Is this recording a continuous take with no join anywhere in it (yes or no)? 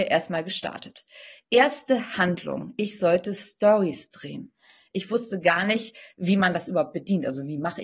yes